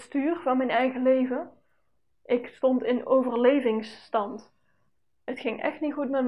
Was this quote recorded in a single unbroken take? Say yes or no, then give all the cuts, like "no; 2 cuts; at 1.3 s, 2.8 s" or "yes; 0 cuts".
yes; 0 cuts